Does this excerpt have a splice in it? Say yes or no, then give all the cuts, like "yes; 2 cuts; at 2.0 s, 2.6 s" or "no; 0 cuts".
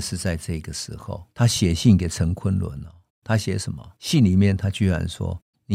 yes; 2 cuts; at 1.3 s, 4.0 s